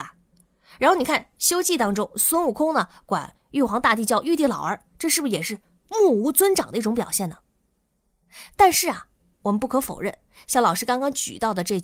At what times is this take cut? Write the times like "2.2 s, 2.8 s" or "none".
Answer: none